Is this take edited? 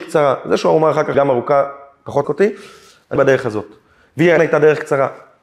yes; 4 cuts; at 1.1 s, 2.2 s, 3.2 s, 4.4 s

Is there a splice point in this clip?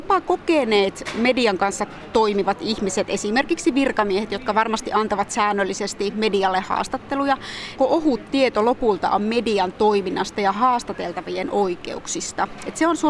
yes; 1 cut; at 7.8 s

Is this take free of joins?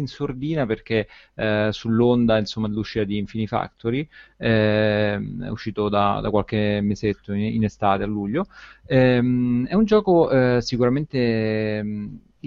yes; 0 cuts

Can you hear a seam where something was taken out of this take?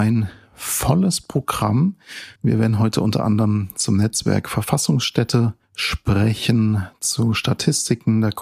yes; 2 cuts; at 2.4 s, 5.6 s

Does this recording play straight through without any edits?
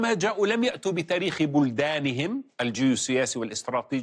no; 1 cut; at 2.5 s

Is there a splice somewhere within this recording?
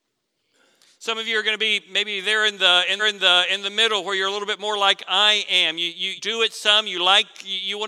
yes; 2 cuts; at 3.0 s, 6.2 s

